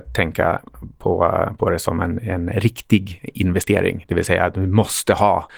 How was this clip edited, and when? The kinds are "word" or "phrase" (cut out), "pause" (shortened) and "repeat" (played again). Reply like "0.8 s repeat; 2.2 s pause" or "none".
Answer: none